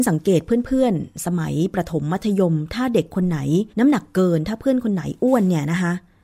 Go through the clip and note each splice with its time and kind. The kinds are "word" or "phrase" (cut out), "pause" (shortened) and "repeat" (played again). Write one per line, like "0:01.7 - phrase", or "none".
0:03.7 - pause